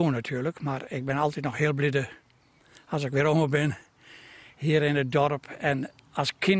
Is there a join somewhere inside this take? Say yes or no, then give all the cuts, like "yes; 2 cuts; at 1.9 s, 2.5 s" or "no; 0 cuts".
no; 0 cuts